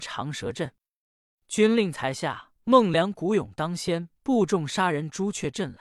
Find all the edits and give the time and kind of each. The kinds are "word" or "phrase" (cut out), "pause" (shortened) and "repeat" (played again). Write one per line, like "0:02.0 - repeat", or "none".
0:02.6 - pause
0:04.2 - pause